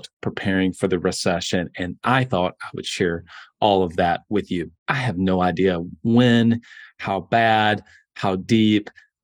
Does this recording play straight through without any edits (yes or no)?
yes